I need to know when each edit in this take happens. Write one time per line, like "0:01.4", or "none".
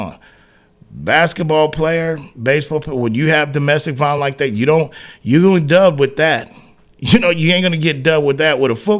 none